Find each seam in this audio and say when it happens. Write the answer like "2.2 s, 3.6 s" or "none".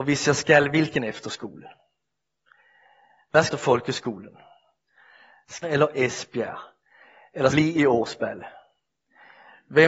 3.5 s, 5.6 s, 7.5 s